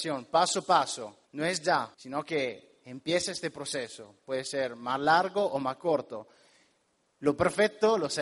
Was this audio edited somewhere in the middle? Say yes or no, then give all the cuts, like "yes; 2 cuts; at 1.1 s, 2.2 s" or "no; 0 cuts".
yes; 2 cuts; at 1.2 s, 1.9 s